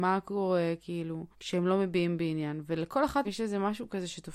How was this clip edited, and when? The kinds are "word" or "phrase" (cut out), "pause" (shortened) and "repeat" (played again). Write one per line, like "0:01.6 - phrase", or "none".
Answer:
0:01.3 - pause
0:03.2 - word